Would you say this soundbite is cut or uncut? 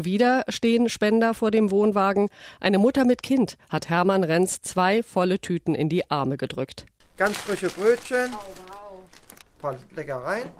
uncut